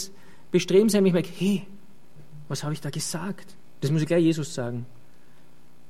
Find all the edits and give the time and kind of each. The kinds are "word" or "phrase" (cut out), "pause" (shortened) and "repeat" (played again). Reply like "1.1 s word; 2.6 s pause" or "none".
none